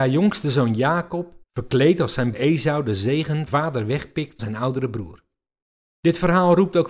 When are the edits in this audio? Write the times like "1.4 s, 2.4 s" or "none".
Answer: 1.4 s, 2.3 s, 3.5 s, 4.4 s, 5.7 s